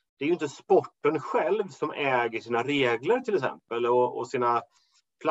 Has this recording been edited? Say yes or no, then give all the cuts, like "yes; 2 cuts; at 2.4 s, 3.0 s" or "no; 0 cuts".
no; 0 cuts